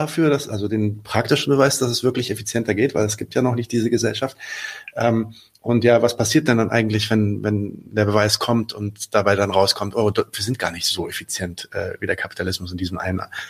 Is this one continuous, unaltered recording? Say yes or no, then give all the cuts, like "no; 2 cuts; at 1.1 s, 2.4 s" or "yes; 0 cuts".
yes; 0 cuts